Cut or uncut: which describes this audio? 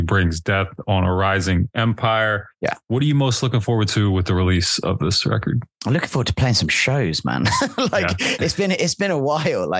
cut